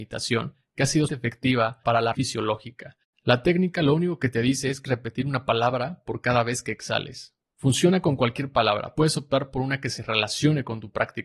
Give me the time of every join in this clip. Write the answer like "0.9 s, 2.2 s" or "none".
1.1 s, 2.1 s, 4.8 s, 8.9 s